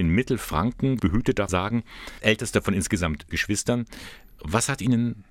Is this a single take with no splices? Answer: no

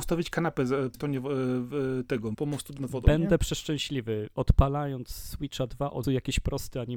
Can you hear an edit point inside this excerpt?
yes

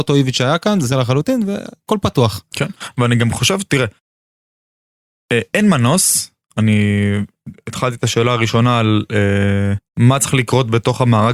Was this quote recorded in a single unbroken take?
no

